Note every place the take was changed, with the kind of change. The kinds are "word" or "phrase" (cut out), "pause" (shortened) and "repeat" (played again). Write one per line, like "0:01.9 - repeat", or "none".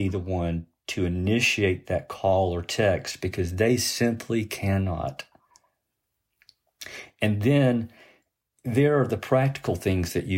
none